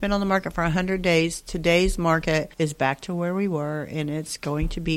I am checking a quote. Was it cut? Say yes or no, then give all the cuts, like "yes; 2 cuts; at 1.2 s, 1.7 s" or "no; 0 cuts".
yes; 1 cut; at 2.5 s